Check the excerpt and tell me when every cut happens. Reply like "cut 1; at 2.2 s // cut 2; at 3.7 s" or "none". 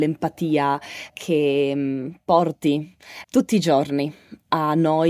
cut 1; at 1.1 s // cut 2; at 3.2 s